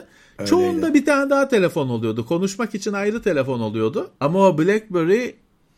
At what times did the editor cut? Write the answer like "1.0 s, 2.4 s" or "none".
4.1 s